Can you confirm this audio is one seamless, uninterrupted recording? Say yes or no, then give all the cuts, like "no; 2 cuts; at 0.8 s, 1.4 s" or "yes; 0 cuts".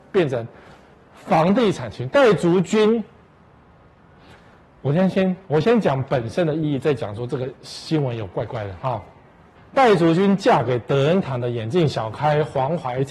no; 1 cut; at 9.6 s